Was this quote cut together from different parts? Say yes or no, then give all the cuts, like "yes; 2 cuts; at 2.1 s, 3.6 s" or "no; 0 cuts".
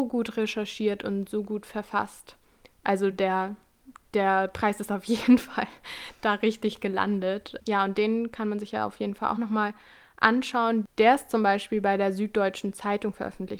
no; 0 cuts